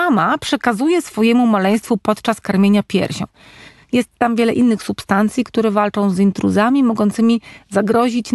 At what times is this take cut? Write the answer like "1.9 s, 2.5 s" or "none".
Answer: none